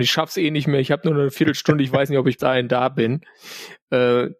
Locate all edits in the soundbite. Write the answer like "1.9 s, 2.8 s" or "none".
2.4 s